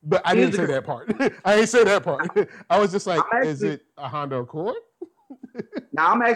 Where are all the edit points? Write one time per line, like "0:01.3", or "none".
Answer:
none